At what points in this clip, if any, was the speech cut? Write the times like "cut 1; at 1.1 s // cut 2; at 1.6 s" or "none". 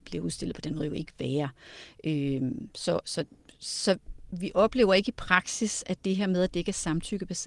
none